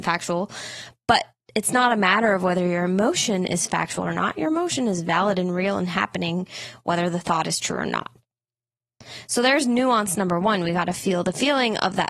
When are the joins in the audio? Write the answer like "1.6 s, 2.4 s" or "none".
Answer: none